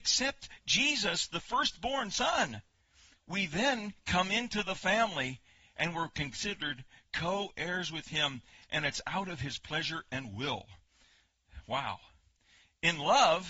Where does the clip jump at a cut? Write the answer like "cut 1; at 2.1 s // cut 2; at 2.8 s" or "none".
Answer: none